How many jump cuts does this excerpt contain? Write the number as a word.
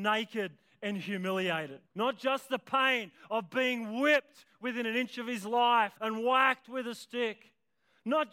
two